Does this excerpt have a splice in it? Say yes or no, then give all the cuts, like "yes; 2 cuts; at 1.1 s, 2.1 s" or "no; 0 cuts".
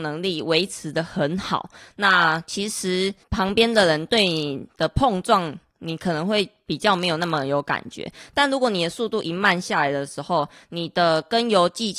no; 0 cuts